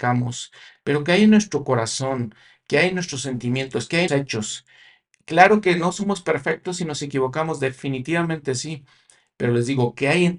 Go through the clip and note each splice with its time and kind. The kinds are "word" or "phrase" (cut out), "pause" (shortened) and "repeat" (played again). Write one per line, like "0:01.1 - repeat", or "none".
0:04.1 - word